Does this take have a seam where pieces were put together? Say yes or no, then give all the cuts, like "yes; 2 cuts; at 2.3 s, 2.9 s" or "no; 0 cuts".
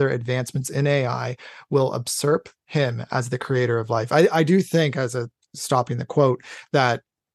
no; 0 cuts